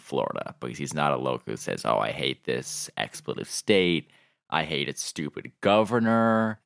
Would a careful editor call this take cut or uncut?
uncut